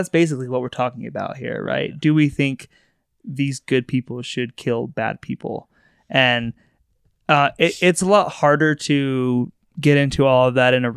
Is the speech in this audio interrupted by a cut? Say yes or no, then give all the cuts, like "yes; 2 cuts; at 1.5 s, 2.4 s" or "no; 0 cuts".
no; 0 cuts